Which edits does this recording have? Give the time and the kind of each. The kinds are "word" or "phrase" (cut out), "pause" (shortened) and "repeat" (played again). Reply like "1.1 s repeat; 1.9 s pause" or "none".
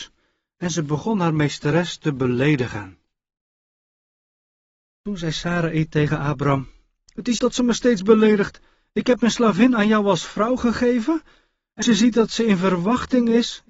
7.4 s phrase; 11.8 s word